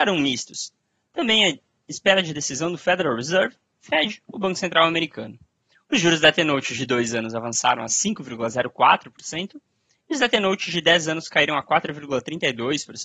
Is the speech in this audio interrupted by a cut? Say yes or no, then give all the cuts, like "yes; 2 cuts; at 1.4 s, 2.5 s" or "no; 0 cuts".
no; 0 cuts